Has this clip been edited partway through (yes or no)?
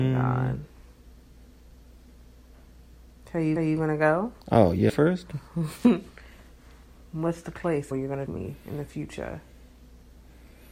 yes